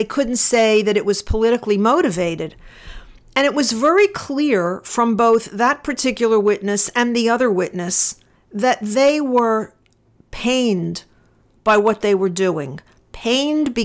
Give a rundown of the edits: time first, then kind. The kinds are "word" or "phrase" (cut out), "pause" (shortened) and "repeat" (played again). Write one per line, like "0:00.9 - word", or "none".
none